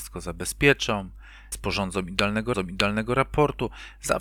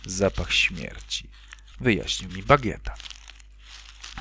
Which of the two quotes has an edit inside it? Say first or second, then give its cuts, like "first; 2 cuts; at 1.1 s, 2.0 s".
first; 2 cuts; at 1.5 s, 2.5 s